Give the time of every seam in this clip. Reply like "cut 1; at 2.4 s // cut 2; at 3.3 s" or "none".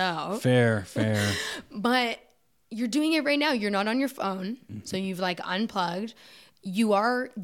none